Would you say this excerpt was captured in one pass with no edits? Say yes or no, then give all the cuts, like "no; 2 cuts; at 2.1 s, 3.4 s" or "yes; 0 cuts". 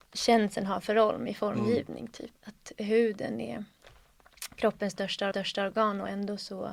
no; 2 cuts; at 2.4 s, 5.3 s